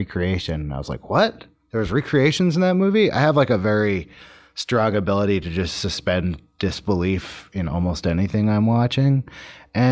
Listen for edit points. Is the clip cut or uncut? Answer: uncut